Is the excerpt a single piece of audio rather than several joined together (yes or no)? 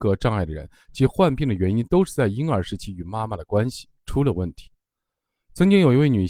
no